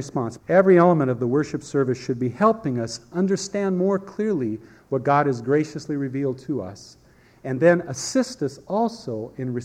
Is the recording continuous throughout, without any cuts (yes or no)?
yes